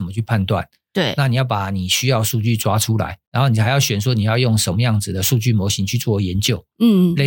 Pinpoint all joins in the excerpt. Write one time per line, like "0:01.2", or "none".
0:03.3